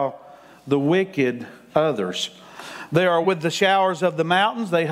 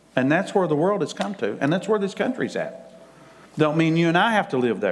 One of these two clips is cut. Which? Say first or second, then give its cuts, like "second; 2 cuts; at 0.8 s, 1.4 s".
first; 2 cuts; at 1.7 s, 3.2 s